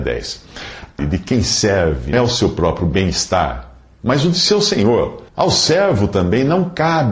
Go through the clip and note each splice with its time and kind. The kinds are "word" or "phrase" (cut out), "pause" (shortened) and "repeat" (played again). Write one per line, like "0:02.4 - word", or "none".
0:01.0 - word
0:02.1 - word
0:02.8 - phrase
0:05.3 - pause